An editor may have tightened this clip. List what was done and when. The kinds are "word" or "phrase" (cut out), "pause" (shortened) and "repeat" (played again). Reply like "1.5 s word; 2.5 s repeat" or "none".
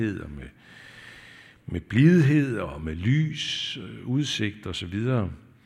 none